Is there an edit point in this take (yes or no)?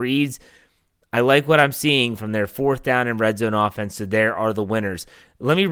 no